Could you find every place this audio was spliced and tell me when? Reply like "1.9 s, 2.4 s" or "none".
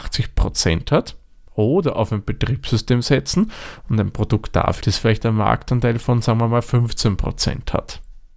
4.8 s